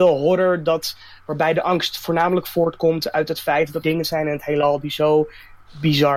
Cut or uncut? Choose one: cut